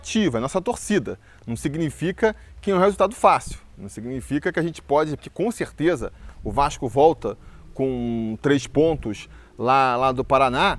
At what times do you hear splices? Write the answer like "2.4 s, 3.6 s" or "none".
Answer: 5.2 s